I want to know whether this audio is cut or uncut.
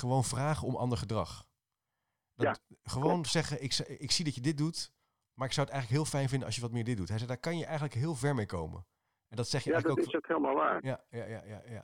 uncut